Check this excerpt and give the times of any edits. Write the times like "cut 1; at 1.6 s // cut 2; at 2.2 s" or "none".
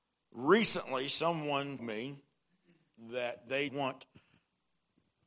cut 1; at 1.8 s // cut 2; at 3.7 s